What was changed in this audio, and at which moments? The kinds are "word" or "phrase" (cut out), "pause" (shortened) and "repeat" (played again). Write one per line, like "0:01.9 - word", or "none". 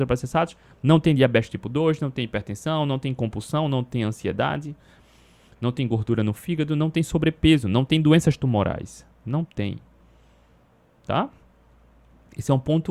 none